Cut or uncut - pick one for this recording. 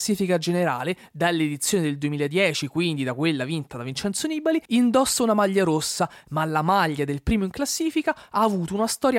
cut